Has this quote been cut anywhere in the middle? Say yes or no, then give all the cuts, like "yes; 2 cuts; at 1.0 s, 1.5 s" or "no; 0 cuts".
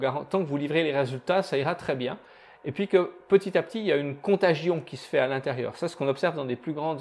no; 0 cuts